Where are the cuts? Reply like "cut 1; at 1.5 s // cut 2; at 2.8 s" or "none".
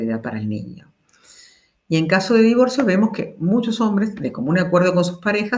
none